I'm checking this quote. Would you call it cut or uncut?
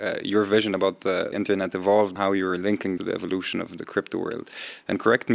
cut